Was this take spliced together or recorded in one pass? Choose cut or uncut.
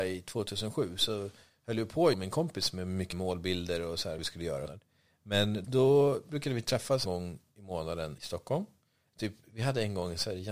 cut